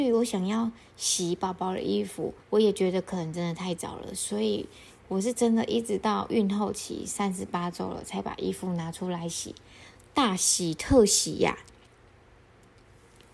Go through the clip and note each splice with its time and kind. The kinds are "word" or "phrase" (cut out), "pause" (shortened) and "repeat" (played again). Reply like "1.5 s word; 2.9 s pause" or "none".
2.4 s pause